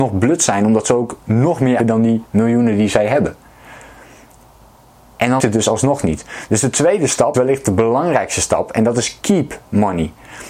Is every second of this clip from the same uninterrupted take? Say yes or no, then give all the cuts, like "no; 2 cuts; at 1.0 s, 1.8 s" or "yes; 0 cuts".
no; 3 cuts; at 1.8 s, 5.4 s, 7.3 s